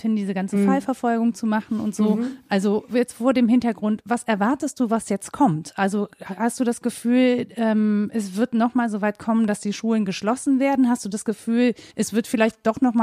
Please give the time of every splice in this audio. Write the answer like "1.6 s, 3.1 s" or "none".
11.9 s